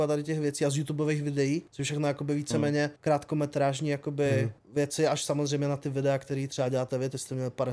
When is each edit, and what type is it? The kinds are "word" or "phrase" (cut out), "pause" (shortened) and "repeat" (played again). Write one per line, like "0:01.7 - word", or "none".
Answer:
0:01.7 - pause
0:03.0 - pause
0:04.6 - pause